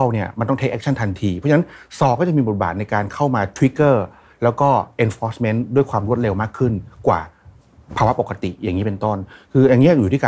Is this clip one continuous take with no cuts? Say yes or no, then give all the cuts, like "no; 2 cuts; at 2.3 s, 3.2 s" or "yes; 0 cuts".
yes; 0 cuts